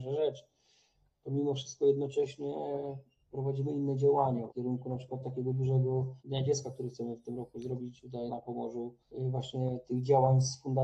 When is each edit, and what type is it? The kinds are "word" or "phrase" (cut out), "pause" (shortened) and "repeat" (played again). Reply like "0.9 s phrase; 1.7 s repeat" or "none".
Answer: 4.5 s phrase; 6.2 s pause; 8.3 s word; 9.0 s pause